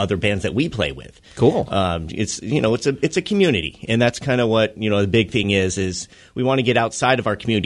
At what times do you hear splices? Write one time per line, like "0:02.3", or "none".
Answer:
none